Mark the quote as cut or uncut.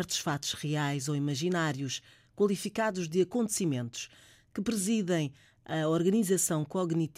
uncut